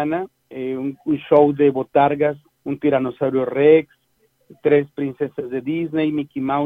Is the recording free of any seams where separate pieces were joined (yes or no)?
no